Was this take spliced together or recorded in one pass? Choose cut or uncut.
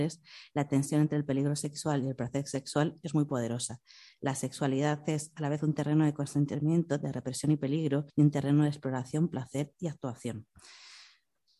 cut